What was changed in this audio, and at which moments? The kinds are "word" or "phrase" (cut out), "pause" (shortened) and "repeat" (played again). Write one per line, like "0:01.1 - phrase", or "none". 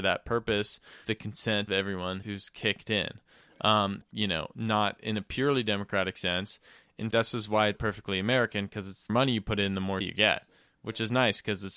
0:01.0 - word
0:01.7 - word
0:02.2 - word
0:04.0 - word
0:07.1 - word
0:07.7 - word
0:09.1 - word
0:10.0 - word